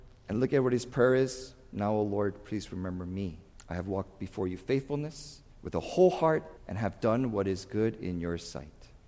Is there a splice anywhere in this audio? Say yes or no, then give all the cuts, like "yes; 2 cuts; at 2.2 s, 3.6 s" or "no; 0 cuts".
yes; 3 cuts; at 3.5 s, 5.5 s, 6.6 s